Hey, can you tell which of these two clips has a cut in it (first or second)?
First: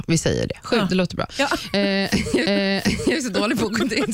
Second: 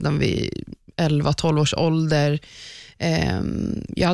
first